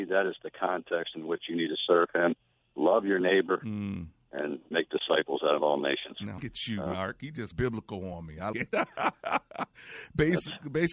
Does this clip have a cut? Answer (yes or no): yes